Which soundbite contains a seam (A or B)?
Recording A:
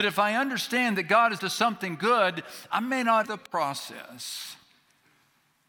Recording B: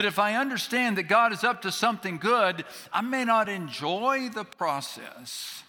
A